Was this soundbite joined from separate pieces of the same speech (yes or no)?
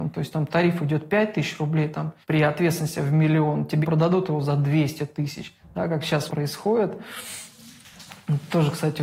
yes